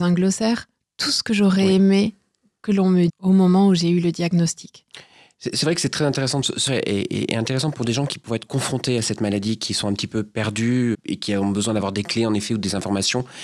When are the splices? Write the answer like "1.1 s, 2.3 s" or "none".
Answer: 3.1 s, 6.7 s, 10.9 s